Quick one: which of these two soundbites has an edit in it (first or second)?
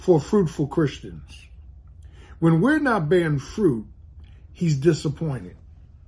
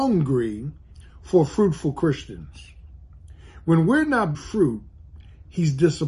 second